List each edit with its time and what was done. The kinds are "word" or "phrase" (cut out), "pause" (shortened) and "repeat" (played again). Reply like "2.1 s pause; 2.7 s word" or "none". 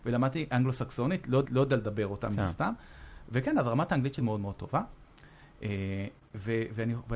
1.4 s repeat; 4.2 s word